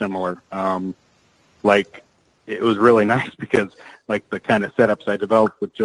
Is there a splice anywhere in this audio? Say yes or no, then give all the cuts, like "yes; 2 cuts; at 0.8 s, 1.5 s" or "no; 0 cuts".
no; 0 cuts